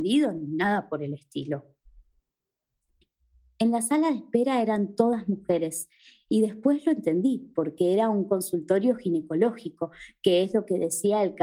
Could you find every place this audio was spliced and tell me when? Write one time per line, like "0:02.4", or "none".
none

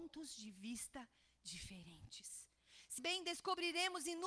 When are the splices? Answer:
0:03.0

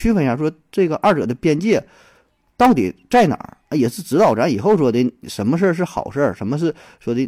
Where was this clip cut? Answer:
none

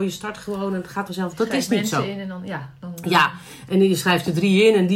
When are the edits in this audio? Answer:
0:01.1

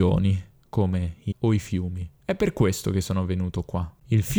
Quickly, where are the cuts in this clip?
0:01.3
0:02.1

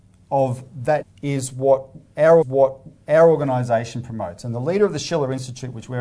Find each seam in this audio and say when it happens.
0:01.0
0:02.4

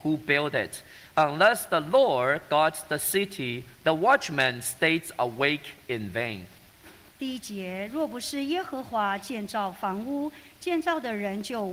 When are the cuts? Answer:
none

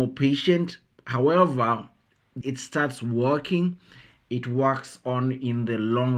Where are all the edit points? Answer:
0:02.4

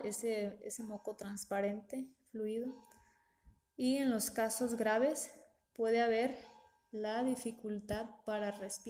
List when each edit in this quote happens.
none

